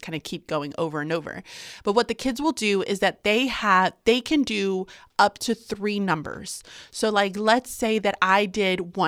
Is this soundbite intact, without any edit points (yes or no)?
yes